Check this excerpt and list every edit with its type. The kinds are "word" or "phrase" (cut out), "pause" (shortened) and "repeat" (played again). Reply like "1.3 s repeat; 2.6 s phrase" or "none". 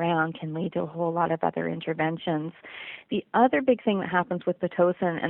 none